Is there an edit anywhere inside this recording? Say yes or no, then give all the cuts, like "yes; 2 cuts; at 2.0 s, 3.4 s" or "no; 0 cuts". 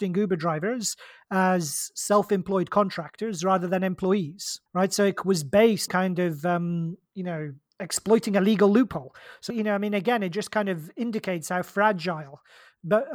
yes; 5 cuts; at 4.7 s, 5.9 s, 7.1 s, 7.7 s, 9.5 s